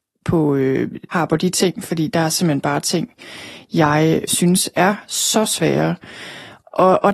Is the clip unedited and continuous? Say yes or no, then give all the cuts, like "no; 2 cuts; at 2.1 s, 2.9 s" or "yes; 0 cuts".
no; 2 cuts; at 1.1 s, 4.3 s